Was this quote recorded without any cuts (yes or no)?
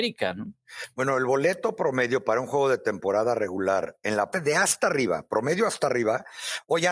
no